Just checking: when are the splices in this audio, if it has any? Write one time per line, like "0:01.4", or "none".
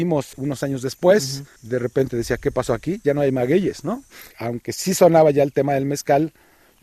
0:01.6
0:04.3